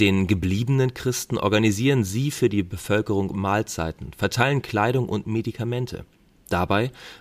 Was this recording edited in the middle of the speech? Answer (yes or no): no